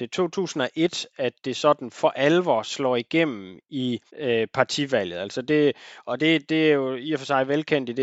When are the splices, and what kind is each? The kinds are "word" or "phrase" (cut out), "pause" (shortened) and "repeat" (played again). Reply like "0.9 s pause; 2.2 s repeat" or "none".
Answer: 4.1 s pause